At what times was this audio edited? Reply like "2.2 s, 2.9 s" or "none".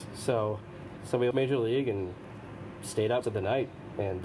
1.0 s, 1.3 s, 3.2 s

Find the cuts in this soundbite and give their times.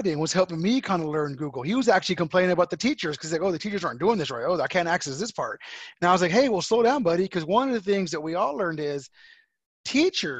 none

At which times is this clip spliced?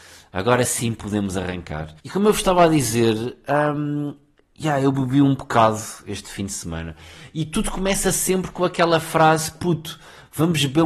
2.0 s

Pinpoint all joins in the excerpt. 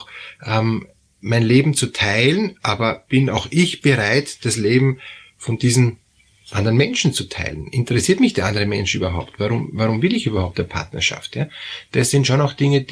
none

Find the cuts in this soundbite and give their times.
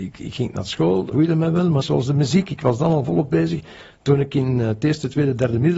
1.1 s, 1.8 s

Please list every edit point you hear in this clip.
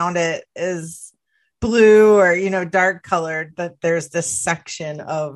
none

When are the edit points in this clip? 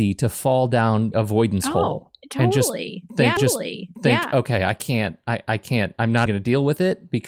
1.1 s, 3.4 s, 6.3 s

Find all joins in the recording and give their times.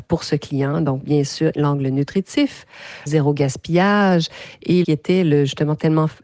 1.0 s, 1.5 s, 3.1 s, 4.8 s

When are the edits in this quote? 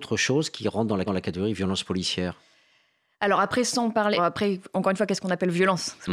1.1 s, 4.2 s

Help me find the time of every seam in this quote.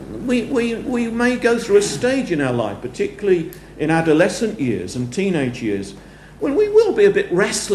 none

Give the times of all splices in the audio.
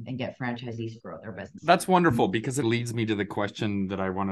1.0 s, 1.6 s, 2.6 s

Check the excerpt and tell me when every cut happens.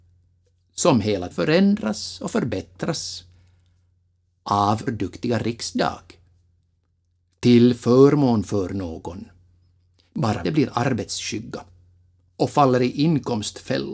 1.3 s, 4.9 s, 10.4 s

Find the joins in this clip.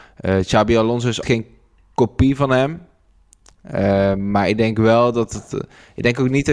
1.2 s

